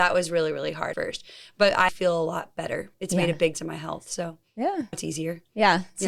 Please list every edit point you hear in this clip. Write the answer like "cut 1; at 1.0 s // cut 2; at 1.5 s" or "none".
cut 1; at 0.9 s // cut 2; at 1.9 s // cut 3; at 3.5 s // cut 4; at 4.9 s